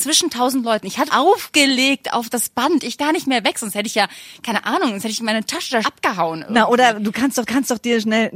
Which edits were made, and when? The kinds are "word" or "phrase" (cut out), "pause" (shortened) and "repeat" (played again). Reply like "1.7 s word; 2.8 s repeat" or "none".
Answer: 1.1 s word; 3.0 s word; 5.8 s phrase; 7.5 s repeat